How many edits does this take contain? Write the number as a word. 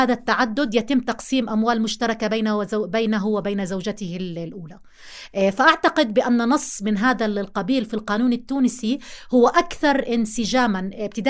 zero